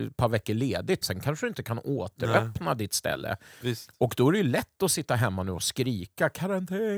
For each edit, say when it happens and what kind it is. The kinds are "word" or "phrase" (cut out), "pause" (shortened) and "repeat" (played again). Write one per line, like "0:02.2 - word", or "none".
0:01.0 - word